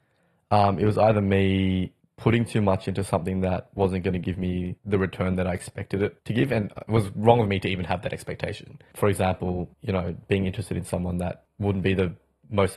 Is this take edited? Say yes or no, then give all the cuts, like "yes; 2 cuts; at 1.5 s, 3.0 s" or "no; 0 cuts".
yes; 3 cuts; at 2.0 s, 4.8 s, 9.7 s